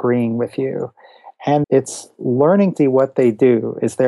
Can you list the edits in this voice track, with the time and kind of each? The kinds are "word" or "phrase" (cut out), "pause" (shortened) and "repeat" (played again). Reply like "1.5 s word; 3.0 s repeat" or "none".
1.6 s word; 2.8 s word